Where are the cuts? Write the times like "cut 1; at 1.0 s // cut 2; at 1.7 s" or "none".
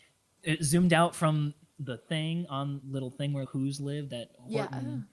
cut 1; at 1.7 s // cut 2; at 2.8 s // cut 3; at 3.5 s